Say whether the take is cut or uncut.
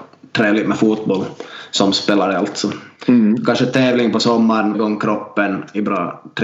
cut